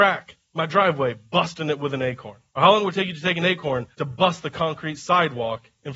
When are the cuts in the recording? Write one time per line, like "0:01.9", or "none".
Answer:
0:02.5
0:03.9